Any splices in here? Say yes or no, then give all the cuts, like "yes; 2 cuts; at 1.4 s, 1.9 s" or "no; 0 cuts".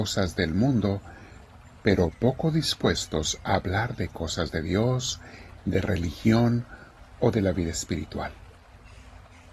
no; 0 cuts